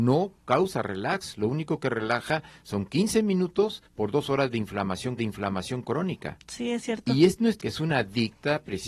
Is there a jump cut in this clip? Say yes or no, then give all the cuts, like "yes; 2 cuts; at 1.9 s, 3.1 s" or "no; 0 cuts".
yes; 3 cuts; at 3.9 s, 5.2 s, 7.6 s